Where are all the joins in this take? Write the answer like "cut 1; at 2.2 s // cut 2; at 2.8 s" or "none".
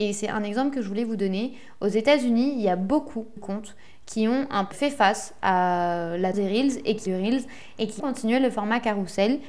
cut 1; at 3.4 s // cut 2; at 4.7 s // cut 3; at 6.3 s // cut 4; at 7.1 s // cut 5; at 8.0 s